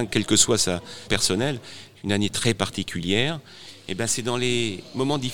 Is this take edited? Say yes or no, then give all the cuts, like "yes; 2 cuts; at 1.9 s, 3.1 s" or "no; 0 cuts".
yes; 1 cut; at 1.1 s